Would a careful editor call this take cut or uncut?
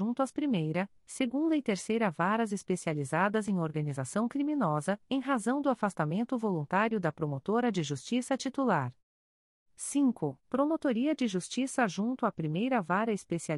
cut